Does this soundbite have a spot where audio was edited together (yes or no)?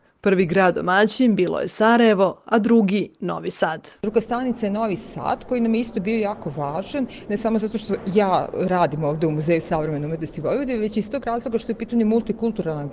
yes